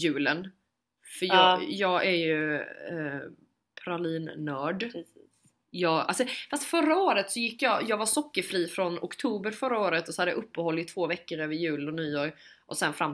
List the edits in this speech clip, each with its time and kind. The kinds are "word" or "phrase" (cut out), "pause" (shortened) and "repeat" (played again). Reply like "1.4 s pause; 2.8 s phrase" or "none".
none